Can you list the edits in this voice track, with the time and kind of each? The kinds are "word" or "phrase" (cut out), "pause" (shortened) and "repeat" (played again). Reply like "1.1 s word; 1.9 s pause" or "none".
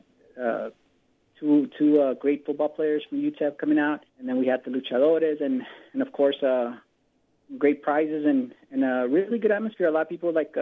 4.1 s pause